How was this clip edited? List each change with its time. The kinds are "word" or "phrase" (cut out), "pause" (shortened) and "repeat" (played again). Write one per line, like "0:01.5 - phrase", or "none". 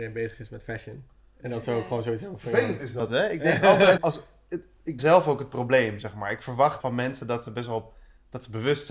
0:04.0 - word
0:05.0 - word
0:06.8 - word